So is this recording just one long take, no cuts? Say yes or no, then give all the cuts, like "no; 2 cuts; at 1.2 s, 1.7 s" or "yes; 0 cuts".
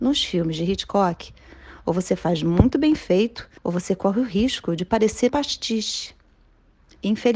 no; 2 cuts; at 3.6 s, 5.3 s